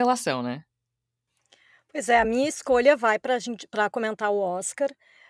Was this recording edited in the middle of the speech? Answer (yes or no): no